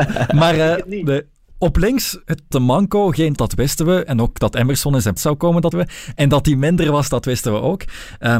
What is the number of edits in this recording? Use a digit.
4